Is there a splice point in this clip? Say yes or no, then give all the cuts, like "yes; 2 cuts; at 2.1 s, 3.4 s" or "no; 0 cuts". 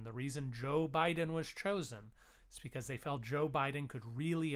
no; 0 cuts